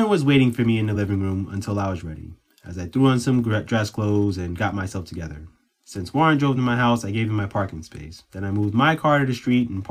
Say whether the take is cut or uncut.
uncut